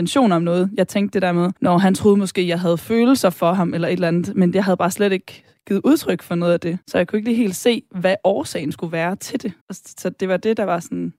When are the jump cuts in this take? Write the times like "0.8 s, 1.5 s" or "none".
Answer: 1.6 s, 6.8 s, 9.6 s